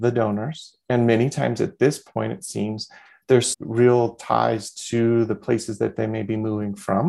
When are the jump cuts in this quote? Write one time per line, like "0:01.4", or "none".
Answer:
0:03.5